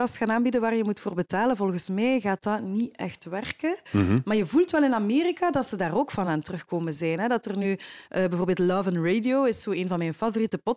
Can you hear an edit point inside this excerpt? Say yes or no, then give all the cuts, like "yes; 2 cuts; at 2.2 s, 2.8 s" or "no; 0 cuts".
no; 0 cuts